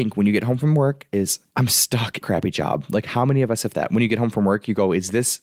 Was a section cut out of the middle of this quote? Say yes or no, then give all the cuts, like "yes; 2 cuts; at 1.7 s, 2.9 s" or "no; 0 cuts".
yes; 3 cuts; at 1.5 s, 2.2 s, 3.7 s